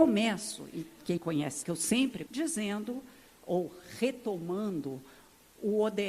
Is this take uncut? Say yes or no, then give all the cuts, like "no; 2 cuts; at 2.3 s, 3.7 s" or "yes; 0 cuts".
no; 3 cuts; at 1.2 s, 1.6 s, 2.3 s